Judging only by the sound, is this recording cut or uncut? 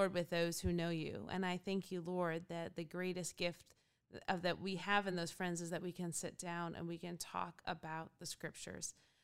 uncut